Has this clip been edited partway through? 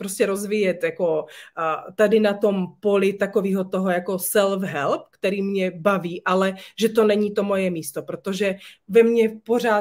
no; 0 cuts

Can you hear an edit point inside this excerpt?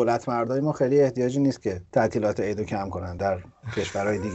no; 0 cuts

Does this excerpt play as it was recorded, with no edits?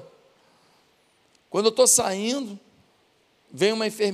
yes; 0 cuts

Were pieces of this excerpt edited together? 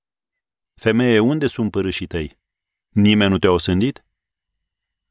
no; 0 cuts

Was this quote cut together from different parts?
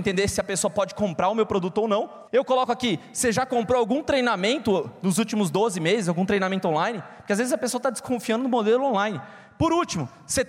yes; 1 cut; at 2.3 s

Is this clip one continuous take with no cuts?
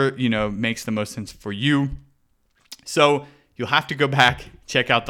yes; 0 cuts

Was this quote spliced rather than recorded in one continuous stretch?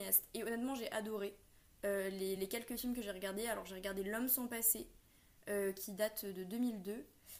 no; 0 cuts

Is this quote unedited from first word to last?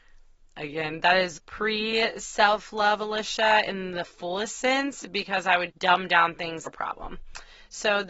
no; 3 cuts; at 1.4 s, 5.7 s, 6.7 s

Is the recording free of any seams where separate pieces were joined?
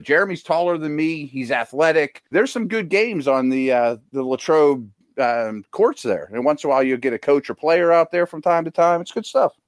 no; 1 cut; at 2.3 s

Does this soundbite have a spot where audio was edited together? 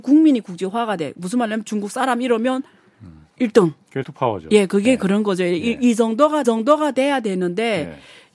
yes; 3 cuts; at 3.3 s, 4.0 s, 6.4 s

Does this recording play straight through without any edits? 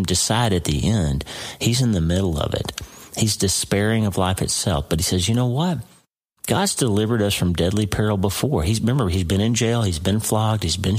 yes; 0 cuts

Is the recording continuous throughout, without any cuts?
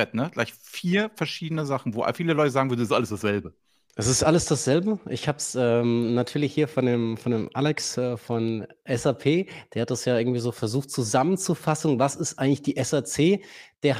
yes; 0 cuts

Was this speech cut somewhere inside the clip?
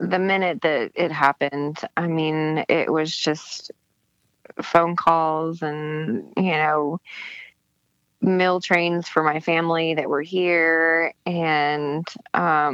no; 0 cuts

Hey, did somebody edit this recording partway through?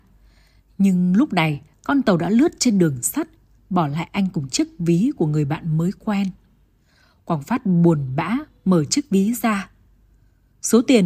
no; 0 cuts

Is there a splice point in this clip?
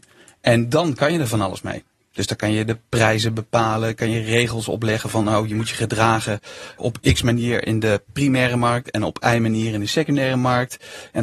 yes; 1 cut; at 6.8 s

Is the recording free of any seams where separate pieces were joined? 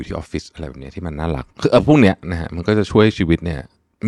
no; 1 cut; at 1.5 s

